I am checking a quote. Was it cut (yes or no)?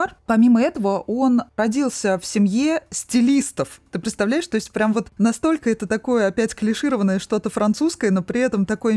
no